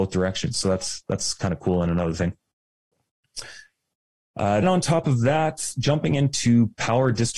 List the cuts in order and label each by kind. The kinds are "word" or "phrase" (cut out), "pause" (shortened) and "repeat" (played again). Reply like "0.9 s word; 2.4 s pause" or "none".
4.6 s word